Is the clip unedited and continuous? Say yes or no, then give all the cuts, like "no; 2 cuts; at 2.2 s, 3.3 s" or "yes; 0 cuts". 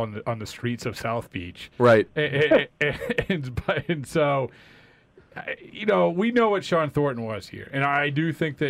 yes; 0 cuts